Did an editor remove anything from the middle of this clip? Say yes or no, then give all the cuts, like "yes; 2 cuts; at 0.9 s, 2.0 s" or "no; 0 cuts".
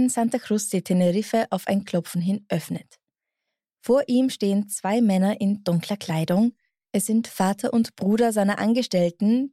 no; 0 cuts